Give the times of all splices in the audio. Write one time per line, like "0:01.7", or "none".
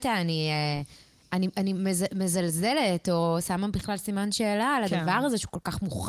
none